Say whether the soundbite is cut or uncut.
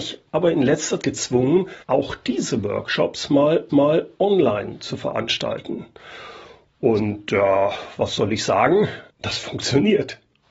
cut